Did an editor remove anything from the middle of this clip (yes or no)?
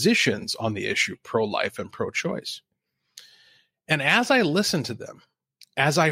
no